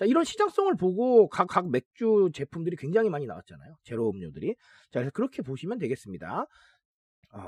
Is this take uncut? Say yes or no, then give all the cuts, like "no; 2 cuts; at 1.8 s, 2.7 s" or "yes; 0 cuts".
no; 1 cut; at 1.5 s